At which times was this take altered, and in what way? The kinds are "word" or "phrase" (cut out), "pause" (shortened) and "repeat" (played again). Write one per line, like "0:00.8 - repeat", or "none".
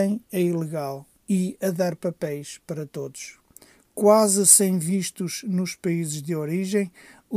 0:01.1 - pause